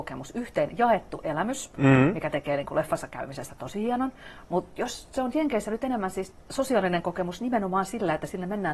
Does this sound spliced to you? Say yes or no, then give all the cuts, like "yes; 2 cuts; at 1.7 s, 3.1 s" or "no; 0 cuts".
yes; 1 cut; at 6.3 s